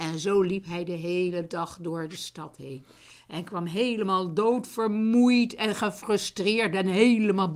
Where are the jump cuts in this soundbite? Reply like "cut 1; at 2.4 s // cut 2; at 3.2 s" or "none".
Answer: none